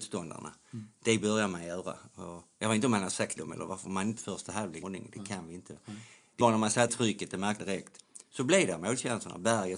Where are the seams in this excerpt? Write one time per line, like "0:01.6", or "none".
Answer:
0:03.4
0:04.2
0:04.8
0:06.4
0:06.9
0:07.6